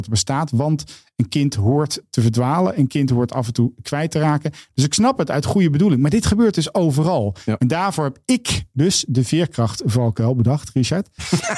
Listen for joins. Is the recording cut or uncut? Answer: uncut